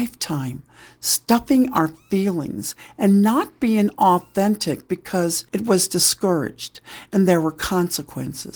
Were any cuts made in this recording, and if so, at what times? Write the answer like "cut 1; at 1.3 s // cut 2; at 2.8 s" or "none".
cut 1; at 5.5 s